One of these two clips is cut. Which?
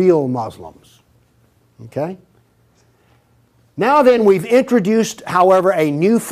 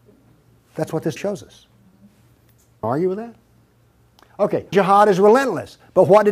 second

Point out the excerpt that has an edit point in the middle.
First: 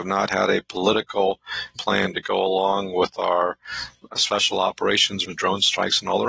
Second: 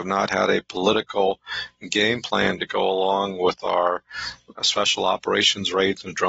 first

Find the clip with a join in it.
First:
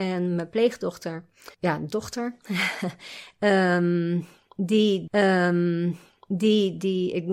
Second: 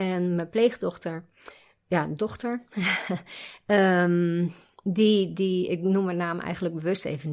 first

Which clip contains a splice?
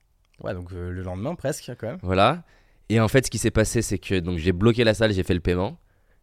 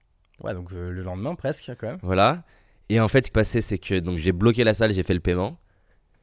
second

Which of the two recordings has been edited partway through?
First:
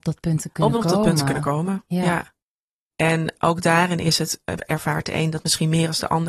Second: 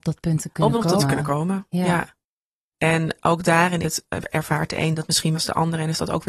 second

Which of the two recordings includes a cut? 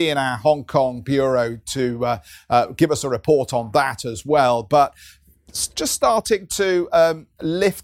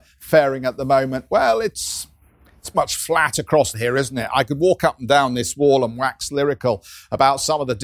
second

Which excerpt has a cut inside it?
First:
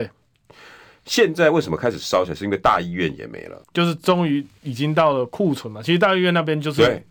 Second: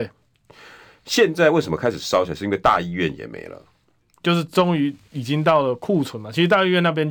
first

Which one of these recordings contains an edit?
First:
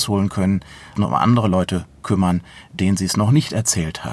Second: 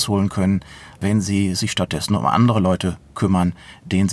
first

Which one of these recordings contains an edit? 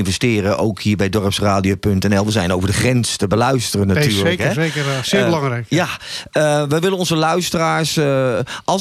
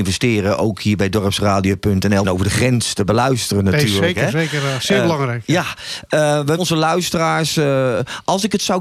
second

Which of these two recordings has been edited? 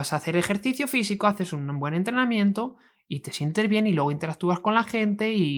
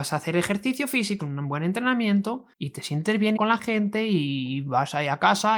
second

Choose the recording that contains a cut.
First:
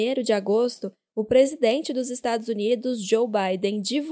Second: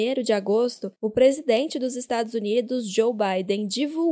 second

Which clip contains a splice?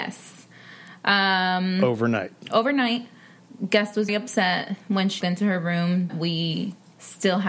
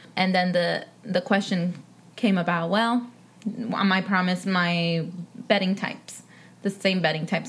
first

